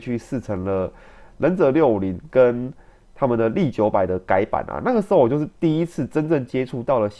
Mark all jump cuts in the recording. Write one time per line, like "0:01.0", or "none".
none